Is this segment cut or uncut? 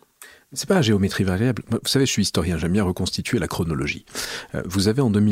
uncut